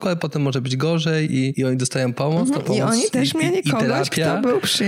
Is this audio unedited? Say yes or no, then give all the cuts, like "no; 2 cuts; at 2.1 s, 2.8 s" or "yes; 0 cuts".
yes; 0 cuts